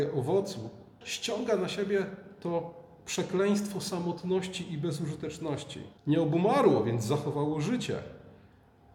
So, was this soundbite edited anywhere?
yes; 2 cuts; at 1.0 s, 6.0 s

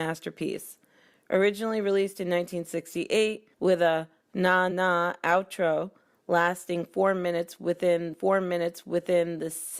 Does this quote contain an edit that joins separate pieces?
yes; 3 cuts; at 3.5 s, 4.7 s, 8.1 s

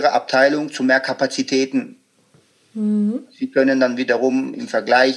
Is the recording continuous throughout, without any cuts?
yes; 0 cuts

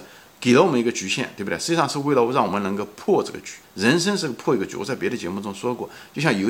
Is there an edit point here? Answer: yes; 1 cut; at 3.6 s

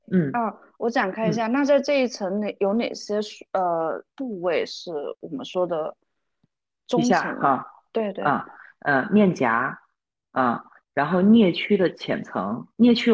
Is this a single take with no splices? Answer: yes; 0 cuts

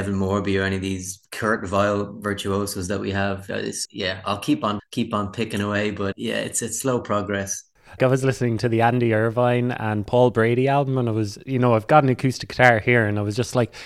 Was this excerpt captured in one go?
no; 4 cuts; at 3.9 s, 4.8 s, 6.1 s, 8.0 s

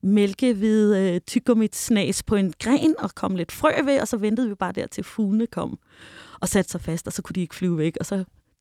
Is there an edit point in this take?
no; 0 cuts

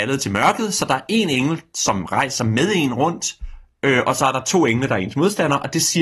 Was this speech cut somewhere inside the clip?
no; 0 cuts

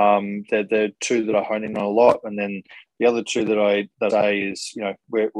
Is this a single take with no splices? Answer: no; 1 cut; at 4.1 s

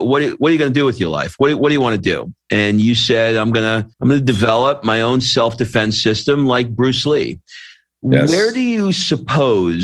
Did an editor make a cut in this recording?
yes; 1 cut; at 3.9 s

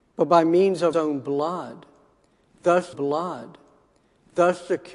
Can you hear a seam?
yes; 2 cuts; at 0.9 s, 2.9 s

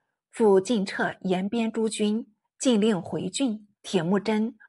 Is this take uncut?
no; 1 cut; at 3.8 s

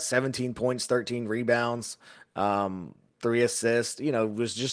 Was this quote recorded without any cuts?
yes; 0 cuts

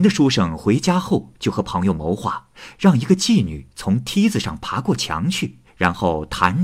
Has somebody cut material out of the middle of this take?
yes; 1 cut; at 5.7 s

